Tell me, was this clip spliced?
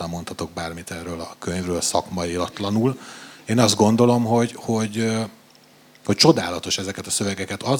no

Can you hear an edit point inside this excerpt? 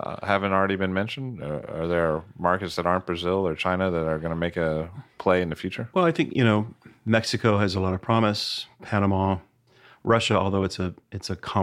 no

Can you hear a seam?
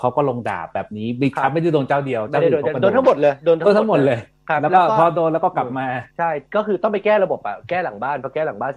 yes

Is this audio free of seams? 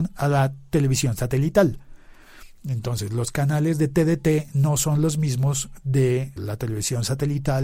no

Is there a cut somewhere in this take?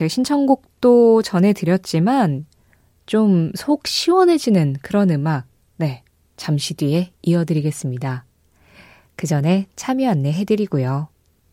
no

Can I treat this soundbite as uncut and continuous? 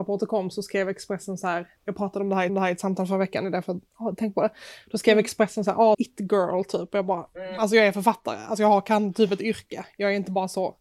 no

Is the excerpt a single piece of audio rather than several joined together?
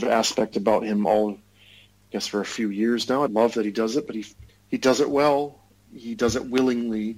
no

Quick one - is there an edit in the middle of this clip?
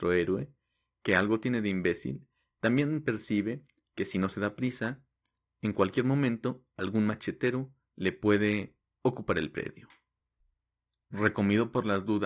no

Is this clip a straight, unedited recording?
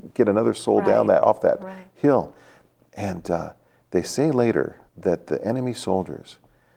no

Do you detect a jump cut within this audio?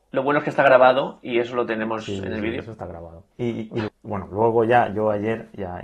yes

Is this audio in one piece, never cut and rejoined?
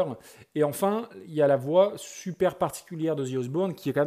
yes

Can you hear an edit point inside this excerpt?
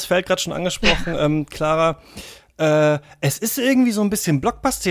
no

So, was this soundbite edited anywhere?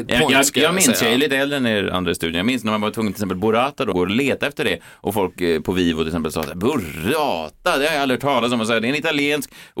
yes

